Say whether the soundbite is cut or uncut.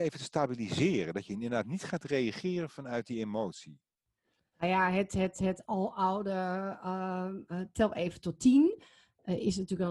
uncut